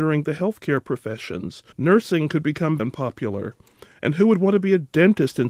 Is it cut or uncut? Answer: cut